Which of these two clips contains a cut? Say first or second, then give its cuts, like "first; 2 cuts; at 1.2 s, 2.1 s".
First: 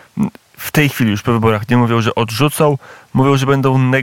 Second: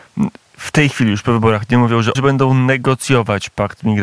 second; 1 cut; at 2.1 s